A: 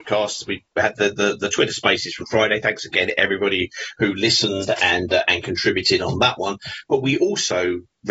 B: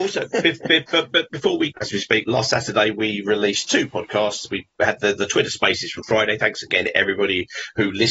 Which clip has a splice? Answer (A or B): B